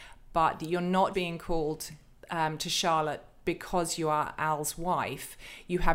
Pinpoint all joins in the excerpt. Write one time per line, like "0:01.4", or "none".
0:01.1